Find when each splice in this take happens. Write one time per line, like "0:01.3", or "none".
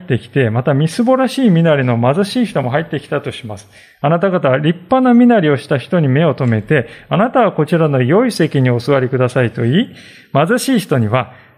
none